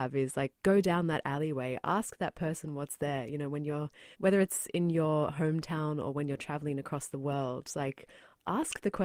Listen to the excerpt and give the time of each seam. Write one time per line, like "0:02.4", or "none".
0:04.1